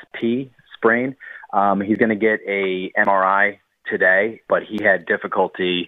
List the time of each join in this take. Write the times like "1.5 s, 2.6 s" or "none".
4.5 s

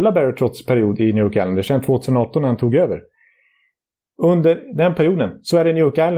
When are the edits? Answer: none

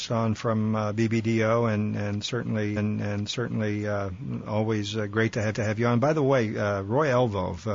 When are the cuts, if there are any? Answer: 2.8 s, 5.5 s

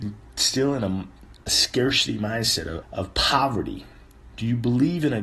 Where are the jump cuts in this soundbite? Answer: 1.4 s, 2.8 s

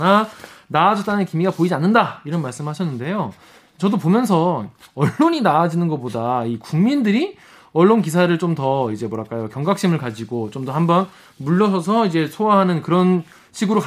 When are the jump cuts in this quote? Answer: none

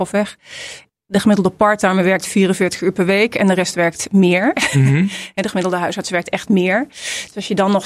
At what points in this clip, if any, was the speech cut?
none

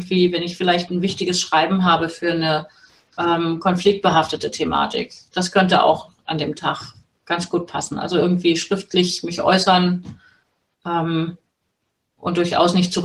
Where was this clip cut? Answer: none

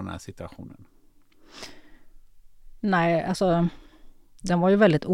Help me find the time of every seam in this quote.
none

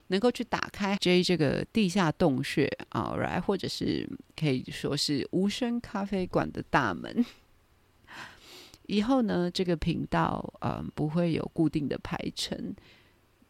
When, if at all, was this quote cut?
1.0 s

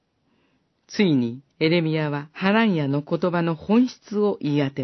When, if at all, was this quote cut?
1.5 s, 2.3 s

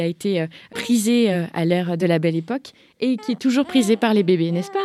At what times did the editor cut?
none

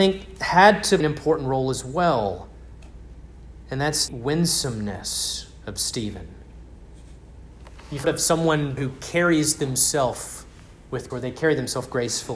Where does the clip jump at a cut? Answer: 1.0 s, 4.1 s, 8.0 s, 8.8 s, 11.1 s

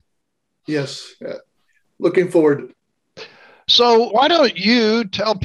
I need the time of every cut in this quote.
2.6 s, 4.1 s

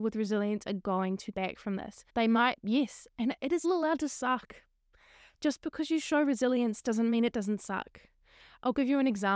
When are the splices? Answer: 1.3 s, 2.1 s, 3.6 s

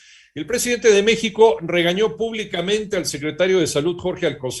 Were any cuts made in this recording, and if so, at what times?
none

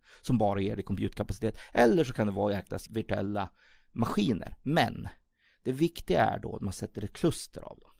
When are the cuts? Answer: 2.9 s

